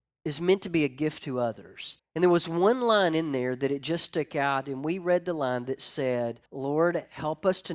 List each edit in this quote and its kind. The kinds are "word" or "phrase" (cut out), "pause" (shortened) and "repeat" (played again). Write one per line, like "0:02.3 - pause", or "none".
0:02.0 - pause
0:06.5 - pause